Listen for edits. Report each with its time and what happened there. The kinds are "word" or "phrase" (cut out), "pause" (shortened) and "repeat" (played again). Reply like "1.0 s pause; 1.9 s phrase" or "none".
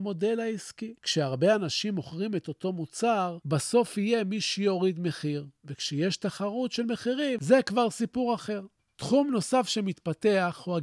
5.5 s pause; 8.8 s pause